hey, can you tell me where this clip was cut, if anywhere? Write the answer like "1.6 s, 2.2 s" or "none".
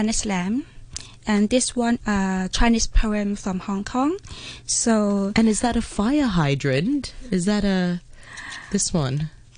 2.0 s